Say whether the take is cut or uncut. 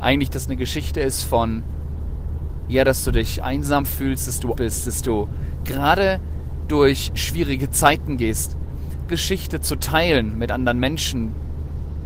cut